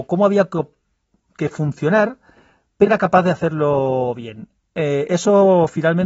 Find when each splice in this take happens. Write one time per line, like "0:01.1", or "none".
0:02.9